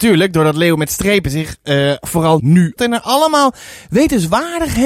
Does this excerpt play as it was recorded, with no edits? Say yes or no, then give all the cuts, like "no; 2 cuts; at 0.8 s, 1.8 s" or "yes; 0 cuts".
no; 3 cuts; at 2.0 s, 2.4 s, 2.8 s